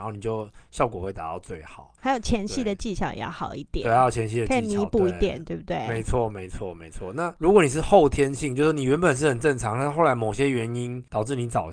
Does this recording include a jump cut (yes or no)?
yes